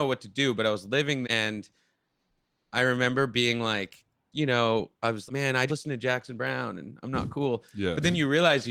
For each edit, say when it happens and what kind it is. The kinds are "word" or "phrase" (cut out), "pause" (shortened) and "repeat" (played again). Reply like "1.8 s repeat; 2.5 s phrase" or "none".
1.2 s word; 4.3 s word; 5.3 s word; 5.7 s word